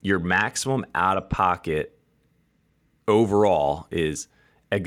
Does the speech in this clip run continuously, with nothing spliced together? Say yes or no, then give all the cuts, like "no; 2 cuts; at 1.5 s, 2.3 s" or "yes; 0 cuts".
yes; 0 cuts